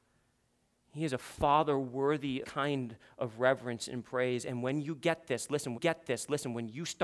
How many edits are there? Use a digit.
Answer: 2